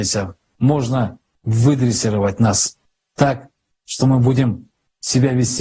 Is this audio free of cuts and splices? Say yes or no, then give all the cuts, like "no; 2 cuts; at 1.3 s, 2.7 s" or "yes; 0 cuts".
yes; 0 cuts